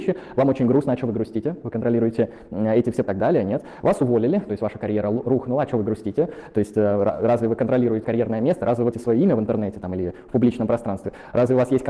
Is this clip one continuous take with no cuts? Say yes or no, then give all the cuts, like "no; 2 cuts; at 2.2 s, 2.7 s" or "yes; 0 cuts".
no; 3 cuts; at 3.0 s, 8.0 s, 8.9 s